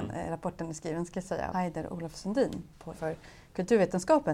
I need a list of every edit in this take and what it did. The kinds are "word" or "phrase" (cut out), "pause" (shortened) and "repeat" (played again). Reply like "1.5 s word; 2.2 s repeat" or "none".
1.5 s phrase; 2.9 s word